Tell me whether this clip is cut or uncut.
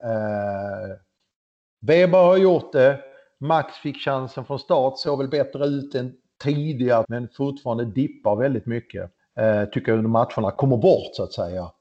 cut